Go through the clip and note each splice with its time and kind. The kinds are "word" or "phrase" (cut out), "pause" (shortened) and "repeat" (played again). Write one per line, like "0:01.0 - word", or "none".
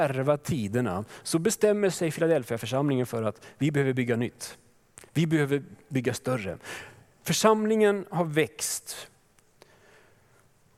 none